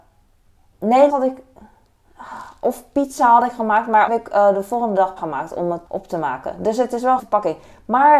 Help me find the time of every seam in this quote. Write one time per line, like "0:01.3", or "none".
0:01.1
0:04.1
0:05.2
0:05.9
0:07.2